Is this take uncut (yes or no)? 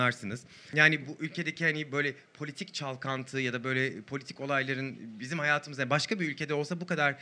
yes